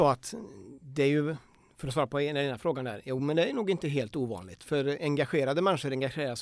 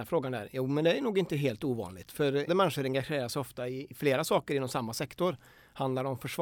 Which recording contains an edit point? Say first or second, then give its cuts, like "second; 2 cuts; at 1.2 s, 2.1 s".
second; 1 cut; at 2.5 s